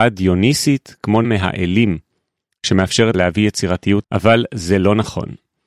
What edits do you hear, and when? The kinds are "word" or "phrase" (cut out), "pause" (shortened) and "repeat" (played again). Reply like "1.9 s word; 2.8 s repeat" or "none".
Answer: 1.2 s word; 3.1 s word; 4.0 s word